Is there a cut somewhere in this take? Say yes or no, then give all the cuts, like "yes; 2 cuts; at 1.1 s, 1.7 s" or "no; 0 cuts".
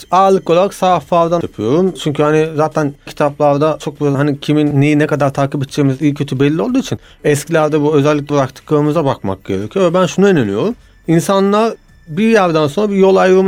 yes; 4 cuts; at 1.4 s, 3.1 s, 4.1 s, 8.3 s